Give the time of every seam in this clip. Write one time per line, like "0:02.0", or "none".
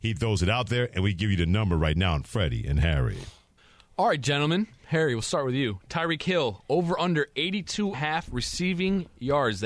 0:07.9